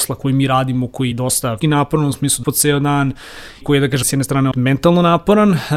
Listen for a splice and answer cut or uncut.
cut